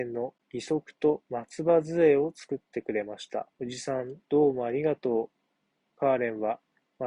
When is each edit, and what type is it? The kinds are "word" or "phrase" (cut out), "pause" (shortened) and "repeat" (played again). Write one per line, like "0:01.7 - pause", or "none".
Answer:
0:01.3 - pause
0:03.5 - pause